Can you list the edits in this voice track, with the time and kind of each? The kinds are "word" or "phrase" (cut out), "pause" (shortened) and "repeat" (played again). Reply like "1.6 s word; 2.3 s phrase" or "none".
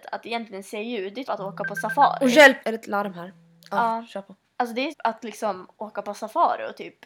1.2 s word; 2.6 s word; 4.9 s word